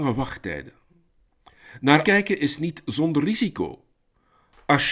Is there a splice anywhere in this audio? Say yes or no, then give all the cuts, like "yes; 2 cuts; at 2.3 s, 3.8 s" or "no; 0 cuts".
yes; 1 cut; at 2.0 s